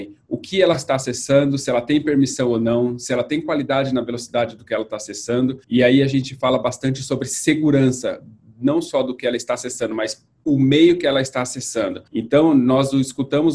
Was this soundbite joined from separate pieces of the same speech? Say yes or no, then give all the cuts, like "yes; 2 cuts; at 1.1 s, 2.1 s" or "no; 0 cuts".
yes; 2 cuts; at 5.6 s, 12.1 s